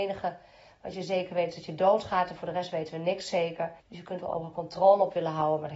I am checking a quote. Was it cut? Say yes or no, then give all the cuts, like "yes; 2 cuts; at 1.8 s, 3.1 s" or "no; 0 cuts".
yes; 1 cut; at 3.8 s